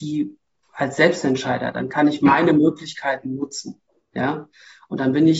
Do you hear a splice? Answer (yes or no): no